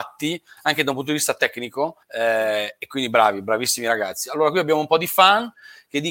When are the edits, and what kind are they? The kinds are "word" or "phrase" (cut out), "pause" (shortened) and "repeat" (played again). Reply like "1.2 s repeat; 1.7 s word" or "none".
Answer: 2.0 s pause